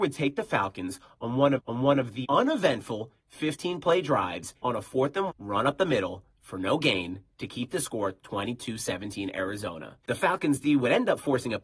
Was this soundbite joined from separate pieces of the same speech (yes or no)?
yes